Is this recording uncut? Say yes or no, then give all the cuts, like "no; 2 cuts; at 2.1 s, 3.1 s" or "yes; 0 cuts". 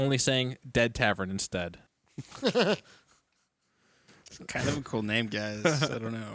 no; 1 cut; at 1.9 s